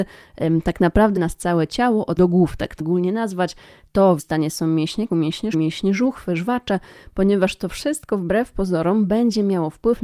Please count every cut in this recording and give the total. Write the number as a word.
six